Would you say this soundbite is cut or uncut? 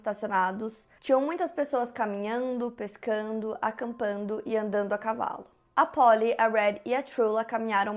uncut